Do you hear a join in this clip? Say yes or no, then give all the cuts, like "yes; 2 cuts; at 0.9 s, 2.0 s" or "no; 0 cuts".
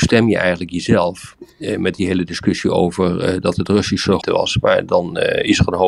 yes; 1 cut; at 4.2 s